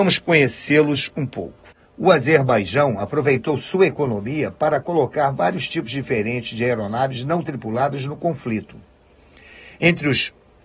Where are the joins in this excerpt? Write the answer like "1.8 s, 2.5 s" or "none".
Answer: none